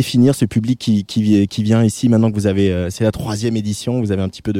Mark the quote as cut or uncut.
uncut